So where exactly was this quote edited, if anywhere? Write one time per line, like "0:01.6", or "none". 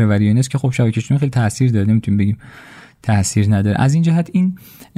none